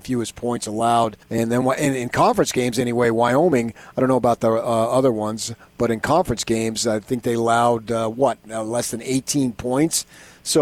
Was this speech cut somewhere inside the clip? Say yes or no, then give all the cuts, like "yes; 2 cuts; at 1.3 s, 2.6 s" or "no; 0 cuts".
yes; 1 cut; at 1.2 s